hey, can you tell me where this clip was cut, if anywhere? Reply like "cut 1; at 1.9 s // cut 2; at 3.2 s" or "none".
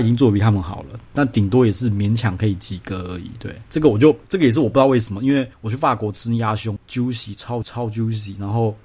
cut 1; at 4.2 s // cut 2; at 5.5 s // cut 3; at 6.8 s // cut 4; at 7.6 s